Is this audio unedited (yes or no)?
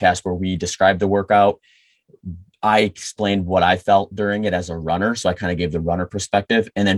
yes